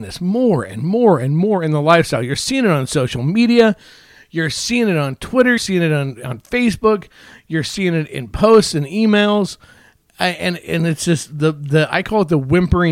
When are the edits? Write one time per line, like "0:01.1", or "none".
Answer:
0:05.6